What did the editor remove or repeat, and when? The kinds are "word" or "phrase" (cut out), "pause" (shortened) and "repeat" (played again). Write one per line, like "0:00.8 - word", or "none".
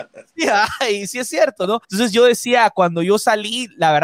0:01.8 - pause